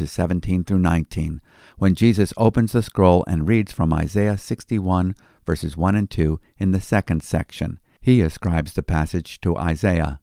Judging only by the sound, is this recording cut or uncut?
uncut